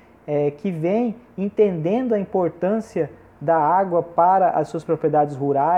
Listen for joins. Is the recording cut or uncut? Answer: uncut